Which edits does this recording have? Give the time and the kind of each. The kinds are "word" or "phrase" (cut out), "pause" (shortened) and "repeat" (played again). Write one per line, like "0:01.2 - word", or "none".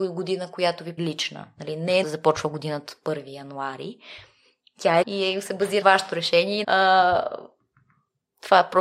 0:01.0 - word
0:02.0 - word
0:02.9 - word
0:05.0 - word
0:05.8 - word
0:06.6 - word